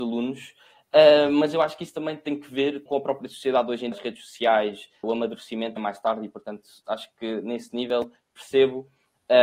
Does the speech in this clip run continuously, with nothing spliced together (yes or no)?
no